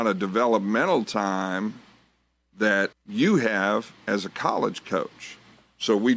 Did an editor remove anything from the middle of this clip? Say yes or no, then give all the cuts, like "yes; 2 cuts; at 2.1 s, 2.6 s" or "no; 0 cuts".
yes; 1 cut; at 2.9 s